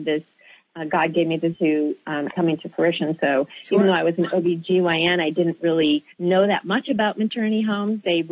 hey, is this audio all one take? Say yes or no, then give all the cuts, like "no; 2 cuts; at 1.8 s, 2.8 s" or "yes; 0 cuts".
no; 3 cuts; at 1.5 s, 2.3 s, 6.1 s